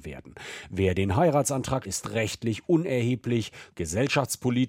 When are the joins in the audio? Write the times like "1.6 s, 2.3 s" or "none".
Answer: 1.8 s